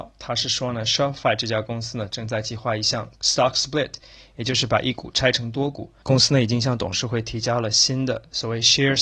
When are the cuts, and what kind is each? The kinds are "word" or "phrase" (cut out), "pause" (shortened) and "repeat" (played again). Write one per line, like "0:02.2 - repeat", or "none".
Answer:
none